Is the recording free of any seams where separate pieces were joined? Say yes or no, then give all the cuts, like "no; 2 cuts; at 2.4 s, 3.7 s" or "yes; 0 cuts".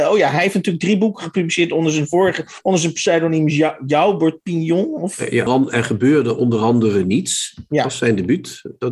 no; 1 cut; at 5.5 s